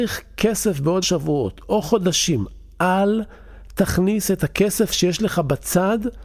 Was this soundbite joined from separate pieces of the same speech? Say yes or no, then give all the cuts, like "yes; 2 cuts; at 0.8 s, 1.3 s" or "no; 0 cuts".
yes; 1 cut; at 1.0 s